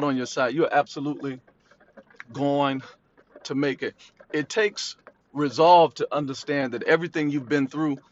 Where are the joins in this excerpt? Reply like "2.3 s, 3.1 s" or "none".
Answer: none